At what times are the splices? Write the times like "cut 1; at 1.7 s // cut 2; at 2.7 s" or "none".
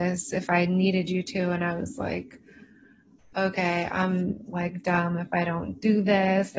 none